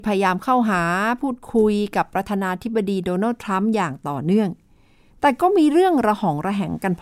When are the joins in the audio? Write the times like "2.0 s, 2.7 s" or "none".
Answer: none